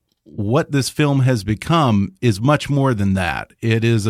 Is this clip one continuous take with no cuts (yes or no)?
yes